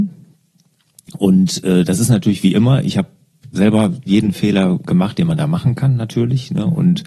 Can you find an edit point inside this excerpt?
no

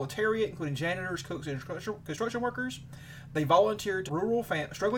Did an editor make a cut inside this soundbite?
yes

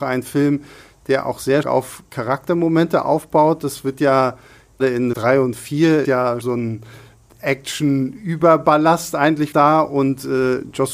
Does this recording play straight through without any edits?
no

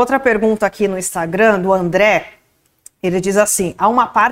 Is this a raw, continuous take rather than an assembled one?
yes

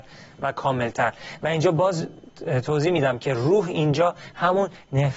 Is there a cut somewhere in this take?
no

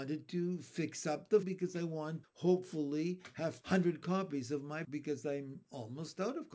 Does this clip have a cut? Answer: yes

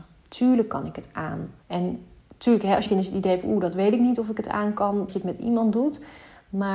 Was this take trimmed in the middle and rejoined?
yes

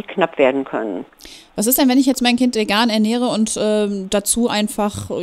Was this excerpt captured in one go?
yes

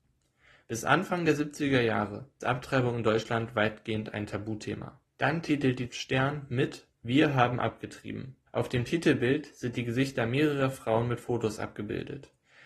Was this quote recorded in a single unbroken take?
no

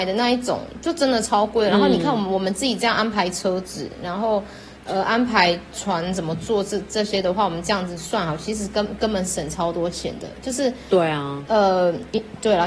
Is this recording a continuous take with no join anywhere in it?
yes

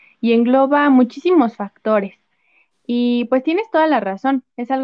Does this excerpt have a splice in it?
no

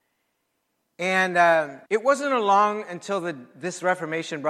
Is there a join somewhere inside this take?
yes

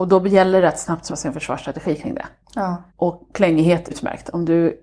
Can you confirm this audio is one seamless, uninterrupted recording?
no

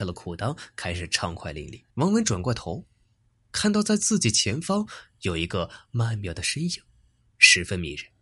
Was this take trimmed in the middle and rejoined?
yes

